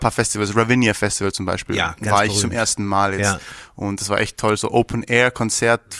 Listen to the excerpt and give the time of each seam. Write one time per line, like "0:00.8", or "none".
none